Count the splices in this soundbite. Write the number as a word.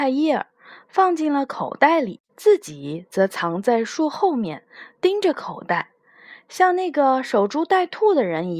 one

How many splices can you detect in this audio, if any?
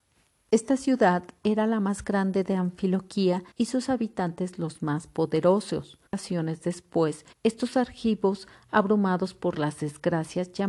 three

